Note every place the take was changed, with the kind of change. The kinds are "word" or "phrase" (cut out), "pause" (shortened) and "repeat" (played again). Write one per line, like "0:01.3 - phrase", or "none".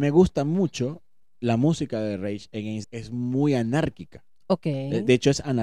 0:02.8 - phrase